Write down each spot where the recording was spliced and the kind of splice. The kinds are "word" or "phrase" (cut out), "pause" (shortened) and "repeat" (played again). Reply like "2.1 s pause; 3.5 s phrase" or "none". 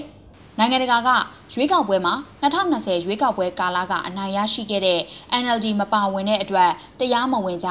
none